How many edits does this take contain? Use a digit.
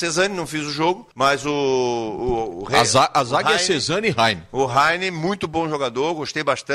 1